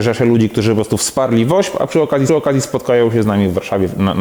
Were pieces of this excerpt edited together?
yes; 1 cut; at 2.3 s

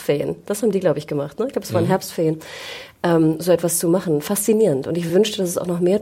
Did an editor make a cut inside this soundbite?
no; 0 cuts

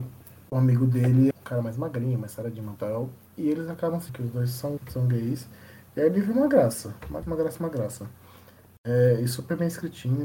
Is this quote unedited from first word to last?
no; 5 cuts; at 1.3 s, 2.8 s, 4.1 s, 4.8 s, 7.2 s

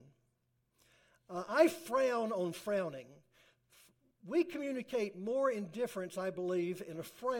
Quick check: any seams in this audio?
no; 0 cuts

